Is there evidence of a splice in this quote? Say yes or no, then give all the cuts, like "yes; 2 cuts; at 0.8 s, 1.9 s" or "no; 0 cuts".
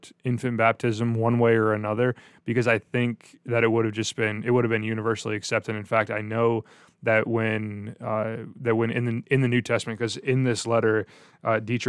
no; 0 cuts